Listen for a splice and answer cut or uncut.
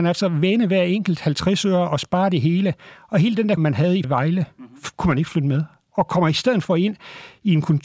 cut